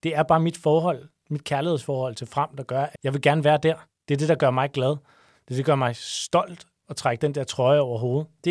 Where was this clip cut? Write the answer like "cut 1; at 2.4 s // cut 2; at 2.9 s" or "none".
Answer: cut 1; at 3.0 s

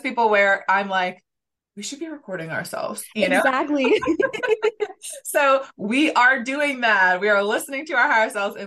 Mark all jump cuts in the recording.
none

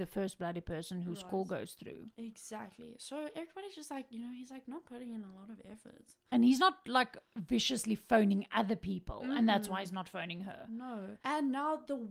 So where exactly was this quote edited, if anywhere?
cut 1; at 7.3 s // cut 2; at 11.2 s

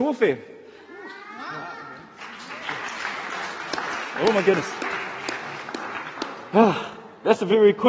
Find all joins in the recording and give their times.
none

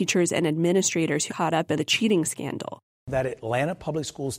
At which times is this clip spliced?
cut 1; at 1.3 s // cut 2; at 1.8 s

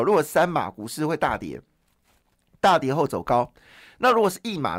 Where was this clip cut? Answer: none

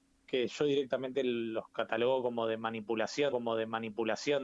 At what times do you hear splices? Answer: cut 1; at 1.7 s // cut 2; at 3.3 s

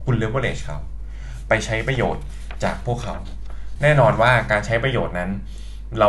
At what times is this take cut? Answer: cut 1; at 3.8 s

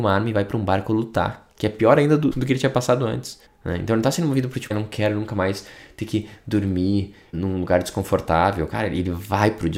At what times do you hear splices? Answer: cut 1; at 2.3 s // cut 2; at 3.4 s // cut 3; at 4.7 s // cut 4; at 7.3 s

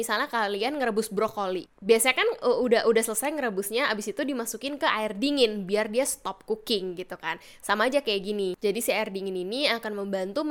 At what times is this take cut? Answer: none

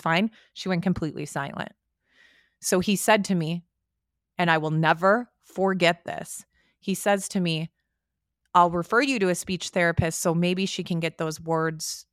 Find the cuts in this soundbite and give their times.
none

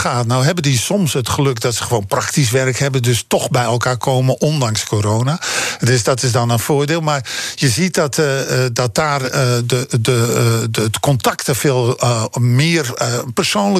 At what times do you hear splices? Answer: none

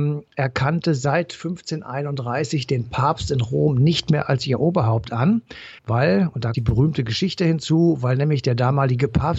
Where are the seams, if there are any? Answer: cut 1; at 5.8 s // cut 2; at 6.5 s

